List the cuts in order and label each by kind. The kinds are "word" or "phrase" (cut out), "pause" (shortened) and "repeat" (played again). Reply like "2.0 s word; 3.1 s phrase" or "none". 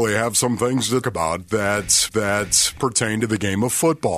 1.0 s word; 2.1 s repeat